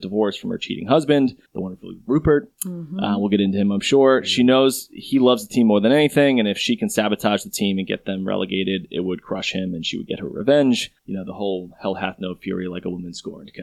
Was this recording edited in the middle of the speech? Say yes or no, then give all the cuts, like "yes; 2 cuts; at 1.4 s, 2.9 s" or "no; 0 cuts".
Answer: yes; 2 cuts; at 1.5 s, 11.0 s